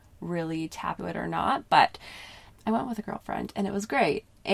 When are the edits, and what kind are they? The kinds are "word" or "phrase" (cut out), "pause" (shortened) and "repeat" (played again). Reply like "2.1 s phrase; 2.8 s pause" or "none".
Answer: 1.0 s word; 2.5 s word